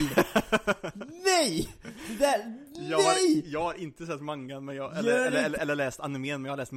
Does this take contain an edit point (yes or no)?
yes